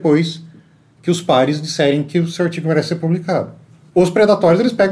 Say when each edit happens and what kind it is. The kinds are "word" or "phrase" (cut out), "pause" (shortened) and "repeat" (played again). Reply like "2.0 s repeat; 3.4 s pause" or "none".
none